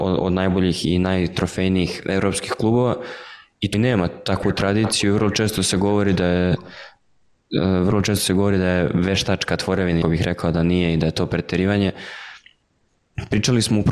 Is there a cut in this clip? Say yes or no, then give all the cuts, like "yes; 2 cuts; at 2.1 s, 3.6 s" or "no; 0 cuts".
yes; 2 cuts; at 3.7 s, 10.0 s